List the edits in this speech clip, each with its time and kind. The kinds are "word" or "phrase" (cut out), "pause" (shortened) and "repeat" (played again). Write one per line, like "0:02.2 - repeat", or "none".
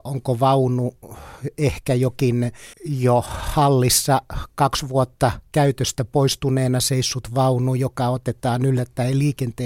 0:02.7 - pause